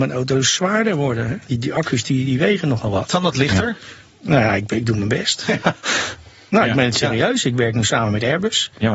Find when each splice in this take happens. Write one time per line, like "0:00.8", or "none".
none